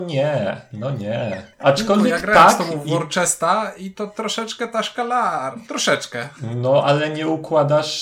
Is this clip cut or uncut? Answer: cut